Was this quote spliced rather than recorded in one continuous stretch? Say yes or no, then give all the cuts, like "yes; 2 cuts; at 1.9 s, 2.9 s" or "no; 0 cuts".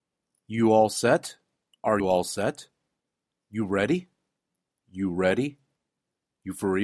yes; 1 cut; at 2.0 s